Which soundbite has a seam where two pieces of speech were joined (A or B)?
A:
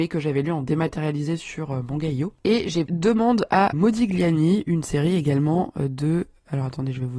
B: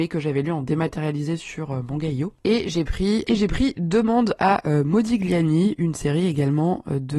A